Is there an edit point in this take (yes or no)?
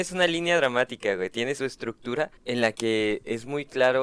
yes